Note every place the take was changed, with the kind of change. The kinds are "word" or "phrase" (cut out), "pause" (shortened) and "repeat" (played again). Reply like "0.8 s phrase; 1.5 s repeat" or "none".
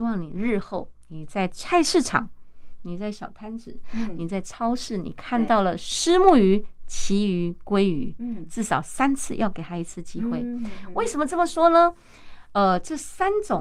none